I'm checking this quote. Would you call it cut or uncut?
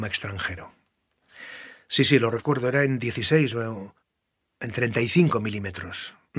uncut